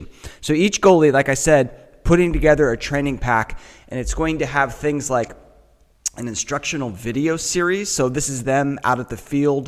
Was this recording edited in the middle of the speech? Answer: no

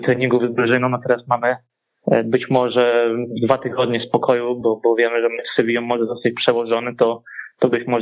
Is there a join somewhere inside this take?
no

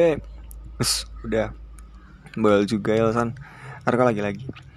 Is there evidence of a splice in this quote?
no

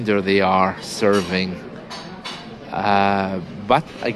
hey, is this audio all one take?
yes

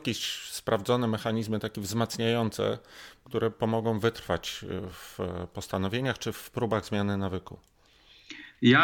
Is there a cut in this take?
no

